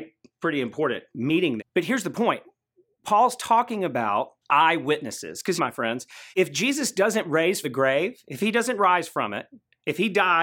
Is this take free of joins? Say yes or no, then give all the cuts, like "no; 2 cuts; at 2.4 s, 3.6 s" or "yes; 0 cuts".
no; 5 cuts; at 1.6 s, 4.4 s, 5.6 s, 6.3 s, 7.6 s